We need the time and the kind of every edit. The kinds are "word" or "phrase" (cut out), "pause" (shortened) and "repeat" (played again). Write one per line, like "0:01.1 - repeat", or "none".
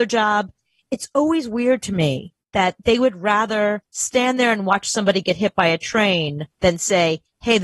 0:02.4 - pause
0:03.9 - pause